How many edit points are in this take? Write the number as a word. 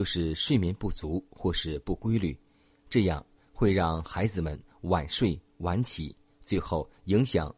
zero